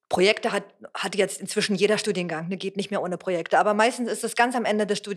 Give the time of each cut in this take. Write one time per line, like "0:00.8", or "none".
none